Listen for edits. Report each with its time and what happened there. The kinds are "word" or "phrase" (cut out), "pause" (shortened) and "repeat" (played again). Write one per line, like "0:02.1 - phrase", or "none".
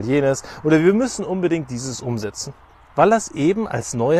none